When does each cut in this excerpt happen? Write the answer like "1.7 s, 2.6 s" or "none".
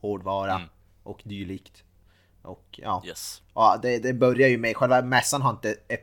none